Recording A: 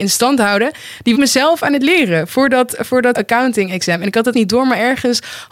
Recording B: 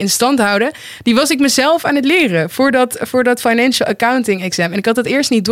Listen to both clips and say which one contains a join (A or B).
A